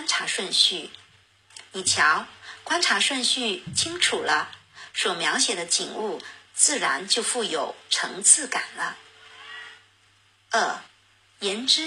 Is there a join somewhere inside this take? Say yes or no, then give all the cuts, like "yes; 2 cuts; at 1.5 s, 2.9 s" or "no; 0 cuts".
no; 0 cuts